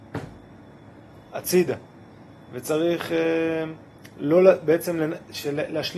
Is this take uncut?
yes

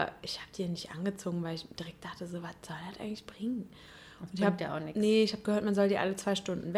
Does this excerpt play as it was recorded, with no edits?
yes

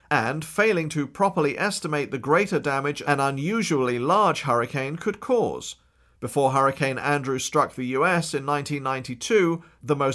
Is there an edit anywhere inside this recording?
no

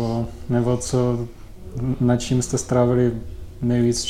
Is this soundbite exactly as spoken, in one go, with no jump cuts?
yes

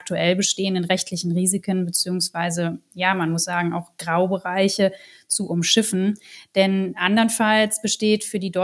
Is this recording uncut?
yes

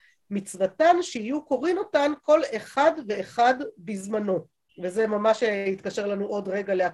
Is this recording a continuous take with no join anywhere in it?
no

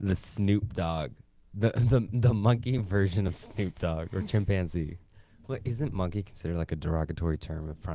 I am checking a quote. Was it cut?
no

